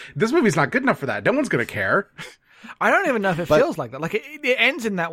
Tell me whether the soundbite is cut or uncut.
uncut